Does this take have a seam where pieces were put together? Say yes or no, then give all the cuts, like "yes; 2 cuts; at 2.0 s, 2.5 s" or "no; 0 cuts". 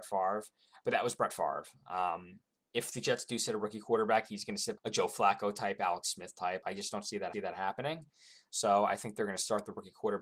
yes; 2 cuts; at 4.8 s, 7.3 s